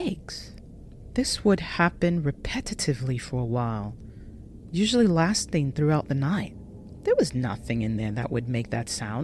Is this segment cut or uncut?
uncut